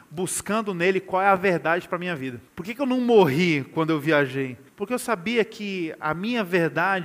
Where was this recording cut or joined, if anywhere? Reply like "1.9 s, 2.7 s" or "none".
2.5 s, 4.7 s